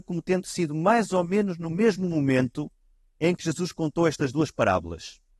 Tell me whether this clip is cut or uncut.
uncut